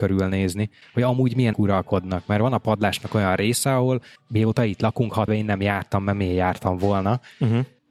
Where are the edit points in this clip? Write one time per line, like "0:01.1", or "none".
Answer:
0:01.5
0:05.3